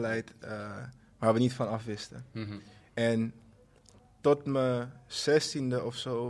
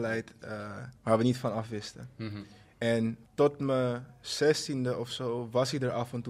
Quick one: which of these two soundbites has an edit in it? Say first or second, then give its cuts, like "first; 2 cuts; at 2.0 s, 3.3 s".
second; 2 cuts; at 1.0 s, 3.3 s